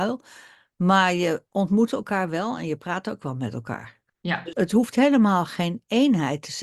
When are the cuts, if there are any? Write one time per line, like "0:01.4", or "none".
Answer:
0:04.1
0:04.5